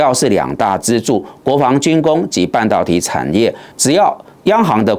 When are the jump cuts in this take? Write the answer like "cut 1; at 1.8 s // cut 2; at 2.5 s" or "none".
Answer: cut 1; at 3.7 s